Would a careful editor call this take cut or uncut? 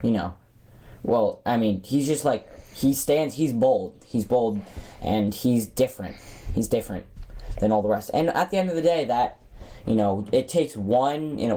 uncut